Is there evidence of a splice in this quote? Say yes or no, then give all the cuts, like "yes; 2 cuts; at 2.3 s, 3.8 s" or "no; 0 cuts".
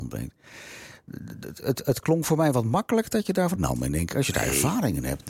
yes; 2 cuts; at 1.6 s, 3.6 s